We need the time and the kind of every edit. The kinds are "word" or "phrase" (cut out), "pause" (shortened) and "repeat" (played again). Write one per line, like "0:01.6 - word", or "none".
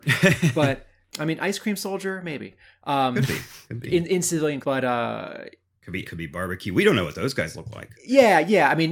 0:01.1 - word
0:04.6 - word
0:06.0 - word